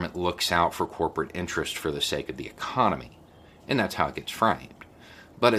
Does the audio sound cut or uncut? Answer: uncut